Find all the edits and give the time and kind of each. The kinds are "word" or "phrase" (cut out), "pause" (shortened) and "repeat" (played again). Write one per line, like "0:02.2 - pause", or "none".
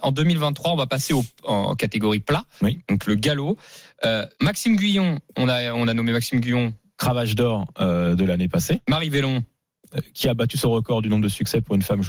0:04.3 - pause

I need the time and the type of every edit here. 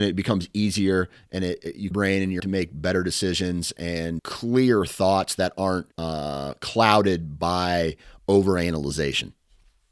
0:01.9 - phrase
0:02.4 - word
0:04.2 - word
0:05.9 - pause

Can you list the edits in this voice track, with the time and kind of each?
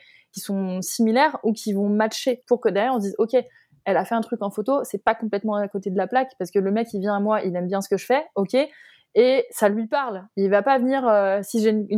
none

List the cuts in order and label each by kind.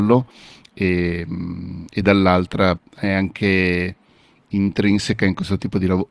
0:02.8 - word

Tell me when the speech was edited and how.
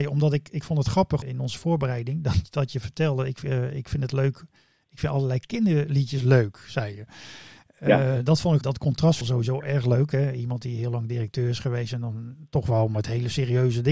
0:01.2 - word
0:08.6 - phrase
0:09.2 - phrase

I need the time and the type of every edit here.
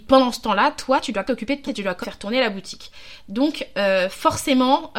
0:01.3 - word
0:01.7 - word
0:02.0 - word

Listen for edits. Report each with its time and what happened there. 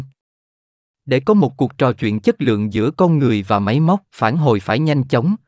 0:04.1 - pause

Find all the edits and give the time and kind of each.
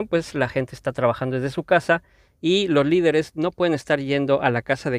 none

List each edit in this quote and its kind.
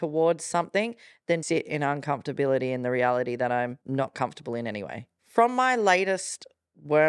0:01.4 - word
0:03.8 - pause

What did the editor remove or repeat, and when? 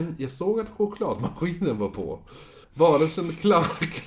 0:02.6 - pause

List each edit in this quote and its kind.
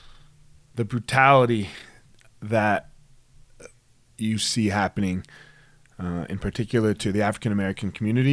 none

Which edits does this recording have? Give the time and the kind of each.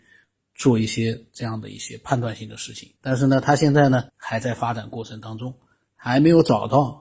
0:03.0 - pause
0:04.1 - pause

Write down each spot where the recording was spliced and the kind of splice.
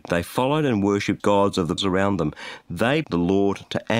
0:01.2 - word
0:01.8 - word
0:03.0 - word

